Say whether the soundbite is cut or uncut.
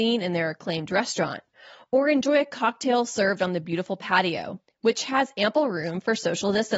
uncut